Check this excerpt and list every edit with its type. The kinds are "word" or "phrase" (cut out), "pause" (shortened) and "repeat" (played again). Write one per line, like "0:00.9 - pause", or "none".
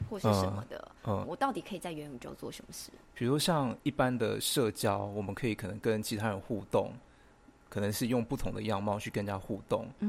0:01.2 - phrase
0:03.8 - pause